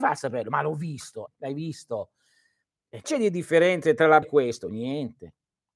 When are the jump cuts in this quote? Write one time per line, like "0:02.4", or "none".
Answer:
0:01.3
0:03.0
0:04.2